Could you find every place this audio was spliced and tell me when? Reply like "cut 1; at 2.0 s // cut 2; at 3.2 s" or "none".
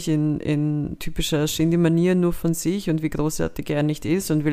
none